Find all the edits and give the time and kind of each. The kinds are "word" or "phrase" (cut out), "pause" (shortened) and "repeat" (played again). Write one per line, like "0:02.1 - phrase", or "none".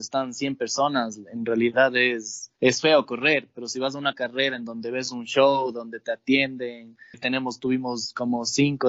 0:02.6 - pause
0:07.1 - word